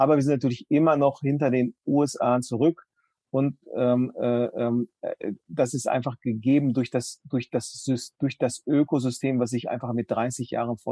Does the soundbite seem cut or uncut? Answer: uncut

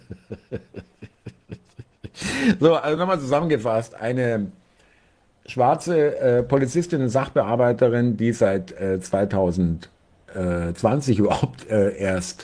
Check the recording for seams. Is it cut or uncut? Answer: uncut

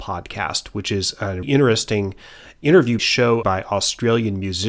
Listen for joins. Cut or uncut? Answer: cut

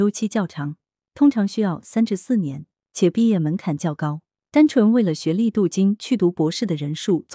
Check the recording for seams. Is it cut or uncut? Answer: uncut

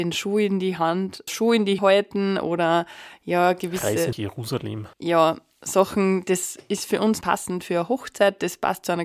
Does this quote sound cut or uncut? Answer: cut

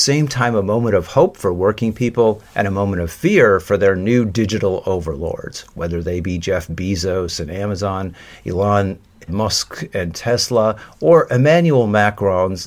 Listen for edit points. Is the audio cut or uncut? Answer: cut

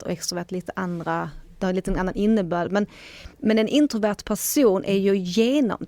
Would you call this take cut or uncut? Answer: cut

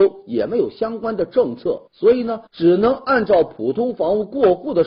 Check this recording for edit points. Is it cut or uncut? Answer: cut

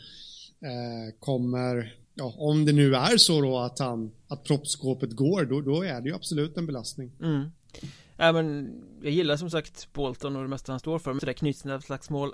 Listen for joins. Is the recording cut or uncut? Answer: cut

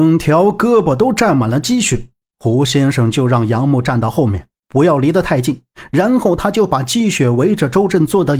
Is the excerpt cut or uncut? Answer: uncut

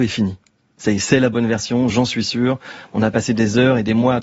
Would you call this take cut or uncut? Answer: uncut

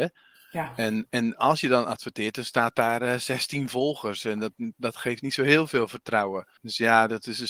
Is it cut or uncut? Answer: cut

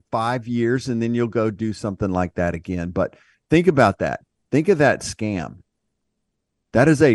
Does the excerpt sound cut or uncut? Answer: uncut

